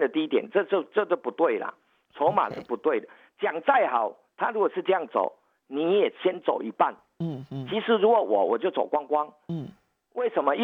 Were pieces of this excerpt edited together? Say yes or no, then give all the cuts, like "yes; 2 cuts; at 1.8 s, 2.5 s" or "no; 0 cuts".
no; 0 cuts